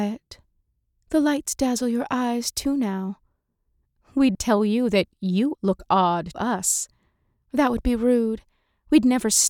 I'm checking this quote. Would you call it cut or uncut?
cut